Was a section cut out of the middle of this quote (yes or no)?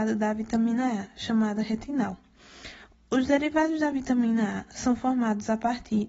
no